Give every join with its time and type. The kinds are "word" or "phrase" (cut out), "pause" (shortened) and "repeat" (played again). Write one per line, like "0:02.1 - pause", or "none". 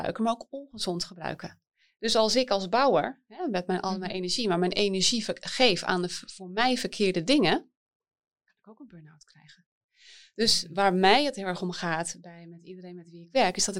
none